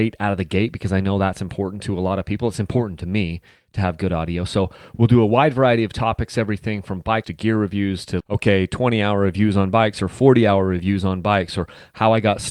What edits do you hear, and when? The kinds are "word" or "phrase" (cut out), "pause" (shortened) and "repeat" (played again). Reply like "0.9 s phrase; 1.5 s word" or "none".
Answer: 7.2 s word; 8.2 s word